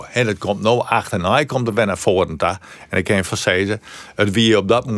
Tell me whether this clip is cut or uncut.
cut